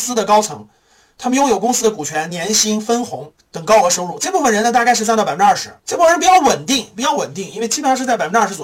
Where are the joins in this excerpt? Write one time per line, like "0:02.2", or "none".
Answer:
0:05.8